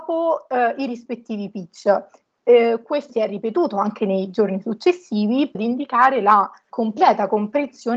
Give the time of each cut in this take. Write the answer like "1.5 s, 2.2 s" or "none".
3.1 s, 5.5 s, 6.7 s